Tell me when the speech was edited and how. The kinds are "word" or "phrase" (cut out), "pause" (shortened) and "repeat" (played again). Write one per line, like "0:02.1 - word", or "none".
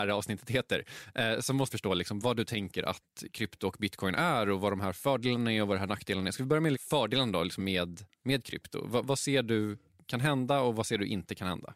0:01.7 - word
0:02.2 - word
0:06.7 - word
0:07.6 - word
0:09.0 - word